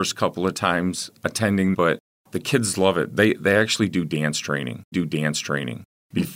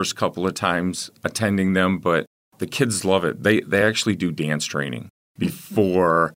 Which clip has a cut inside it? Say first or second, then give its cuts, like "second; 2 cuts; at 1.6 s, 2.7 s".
first; 2 cuts; at 1.7 s, 4.9 s